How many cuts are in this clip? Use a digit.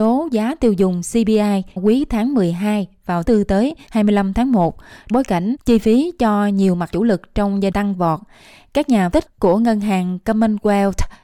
6